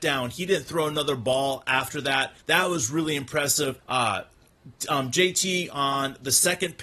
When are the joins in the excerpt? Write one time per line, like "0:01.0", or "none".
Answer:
0:02.4
0:03.8